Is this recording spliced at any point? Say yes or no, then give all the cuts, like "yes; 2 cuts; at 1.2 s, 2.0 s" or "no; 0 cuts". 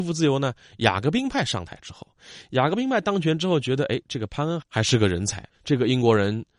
no; 0 cuts